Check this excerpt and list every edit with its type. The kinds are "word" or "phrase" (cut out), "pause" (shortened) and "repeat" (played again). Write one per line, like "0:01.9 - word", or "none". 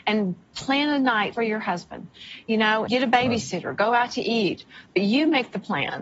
0:01.3 - word
0:02.9 - word